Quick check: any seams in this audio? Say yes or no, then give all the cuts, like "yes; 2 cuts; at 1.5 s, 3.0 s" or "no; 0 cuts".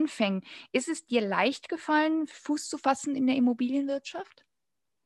no; 0 cuts